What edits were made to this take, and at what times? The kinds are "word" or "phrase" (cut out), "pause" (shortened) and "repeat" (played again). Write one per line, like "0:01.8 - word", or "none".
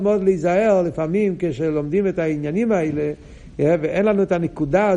none